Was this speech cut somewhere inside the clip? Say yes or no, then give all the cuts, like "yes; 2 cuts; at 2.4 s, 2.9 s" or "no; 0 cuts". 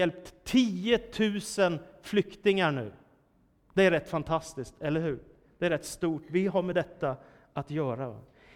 no; 0 cuts